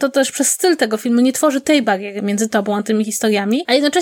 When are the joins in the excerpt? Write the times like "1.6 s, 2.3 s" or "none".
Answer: none

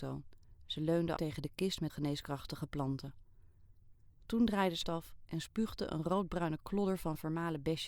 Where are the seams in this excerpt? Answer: 1.2 s, 1.9 s, 4.8 s

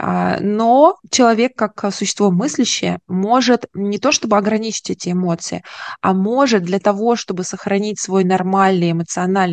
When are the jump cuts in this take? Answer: 1.0 s

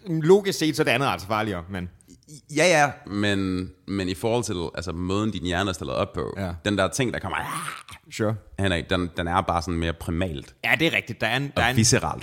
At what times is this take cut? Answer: none

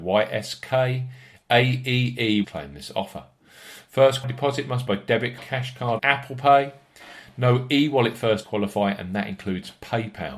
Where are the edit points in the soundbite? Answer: 2.4 s, 4.2 s, 4.9 s, 5.4 s, 6.0 s, 8.4 s

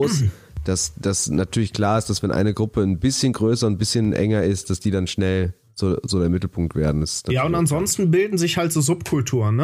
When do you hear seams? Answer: none

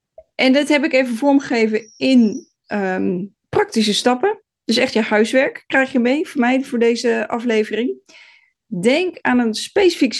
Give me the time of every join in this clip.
3.4 s

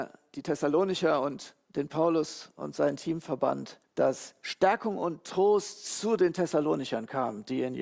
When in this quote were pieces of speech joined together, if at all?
3.8 s

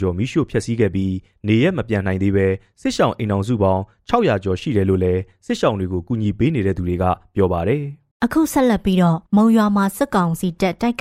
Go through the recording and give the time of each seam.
8.1 s, 9.3 s

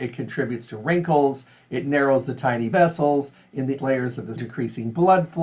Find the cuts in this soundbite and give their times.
2.7 s, 3.8 s, 4.4 s

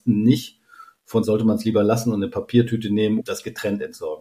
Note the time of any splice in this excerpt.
1.2 s, 3.2 s

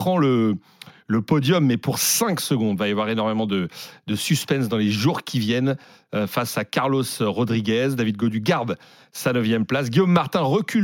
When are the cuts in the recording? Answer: none

